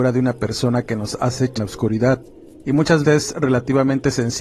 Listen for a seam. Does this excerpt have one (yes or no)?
yes